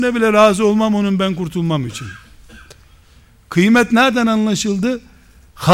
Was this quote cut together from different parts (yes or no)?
no